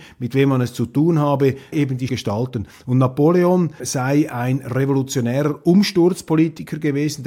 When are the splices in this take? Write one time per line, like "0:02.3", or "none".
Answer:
0:01.7
0:02.1
0:03.8